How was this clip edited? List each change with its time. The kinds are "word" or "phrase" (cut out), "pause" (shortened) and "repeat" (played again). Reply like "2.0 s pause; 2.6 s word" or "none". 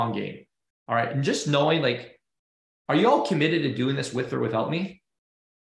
none

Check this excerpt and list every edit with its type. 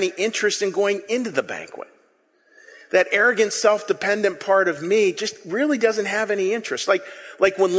none

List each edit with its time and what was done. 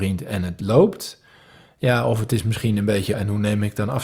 3.1 s word

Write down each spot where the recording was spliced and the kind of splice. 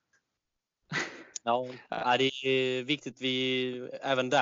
none

